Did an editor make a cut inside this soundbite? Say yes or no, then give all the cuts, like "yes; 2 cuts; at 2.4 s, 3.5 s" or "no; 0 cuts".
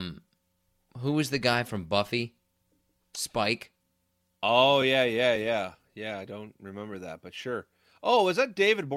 no; 0 cuts